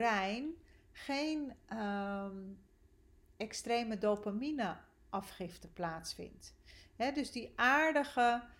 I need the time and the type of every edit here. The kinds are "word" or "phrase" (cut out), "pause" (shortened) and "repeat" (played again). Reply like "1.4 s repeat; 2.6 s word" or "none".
none

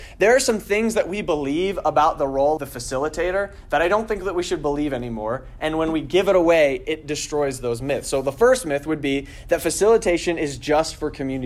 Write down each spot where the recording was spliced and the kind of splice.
2.6 s word

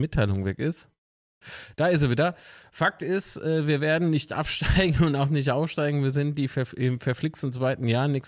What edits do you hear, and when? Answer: none

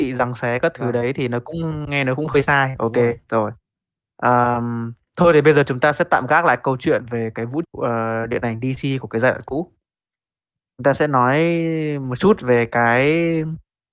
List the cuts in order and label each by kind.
7.6 s word

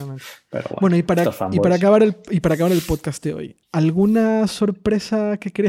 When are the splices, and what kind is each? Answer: 3.6 s pause

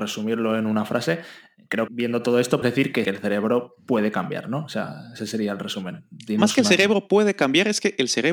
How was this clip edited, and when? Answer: 1.9 s word; 2.6 s word; 3.0 s word

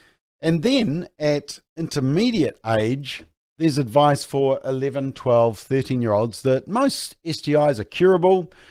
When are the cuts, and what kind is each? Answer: none

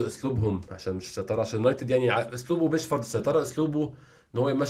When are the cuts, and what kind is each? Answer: none

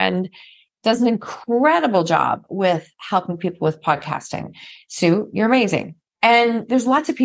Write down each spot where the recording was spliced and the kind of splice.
6.0 s pause

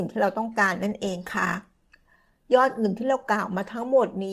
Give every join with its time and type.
none

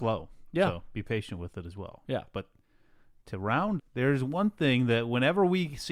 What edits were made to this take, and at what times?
3.8 s word

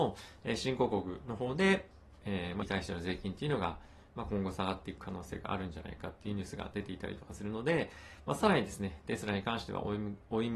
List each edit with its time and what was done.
2.6 s word

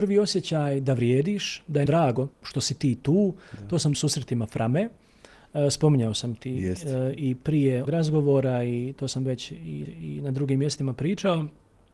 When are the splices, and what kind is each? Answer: 1.9 s word; 2.3 s pause; 3.9 s phrase; 7.8 s word; 9.8 s repeat

